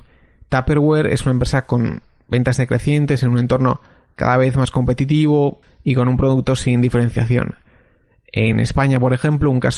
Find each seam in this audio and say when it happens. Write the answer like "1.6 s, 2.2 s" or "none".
none